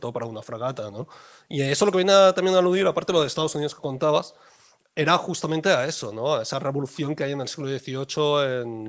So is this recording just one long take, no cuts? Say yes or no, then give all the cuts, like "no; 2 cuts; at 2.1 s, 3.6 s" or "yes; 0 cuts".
yes; 0 cuts